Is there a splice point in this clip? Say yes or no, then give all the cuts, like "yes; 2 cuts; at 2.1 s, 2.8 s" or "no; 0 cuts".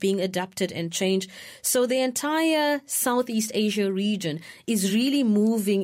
no; 0 cuts